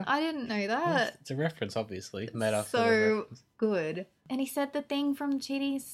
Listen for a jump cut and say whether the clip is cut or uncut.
uncut